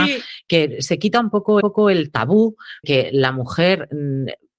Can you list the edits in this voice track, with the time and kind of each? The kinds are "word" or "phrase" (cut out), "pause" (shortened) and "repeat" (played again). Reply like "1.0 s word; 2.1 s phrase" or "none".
1.6 s repeat; 2.8 s word